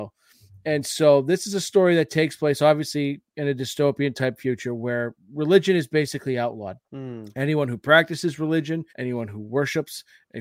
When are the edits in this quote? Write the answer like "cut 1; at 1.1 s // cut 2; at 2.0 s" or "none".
cut 1; at 6.8 s // cut 2; at 8.9 s